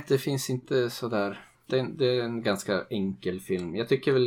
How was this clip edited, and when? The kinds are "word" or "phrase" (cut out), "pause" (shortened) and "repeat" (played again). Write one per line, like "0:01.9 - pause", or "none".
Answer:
0:01.5 - pause